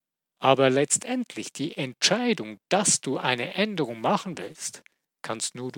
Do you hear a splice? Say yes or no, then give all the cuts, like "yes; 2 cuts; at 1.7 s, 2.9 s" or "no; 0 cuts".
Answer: no; 0 cuts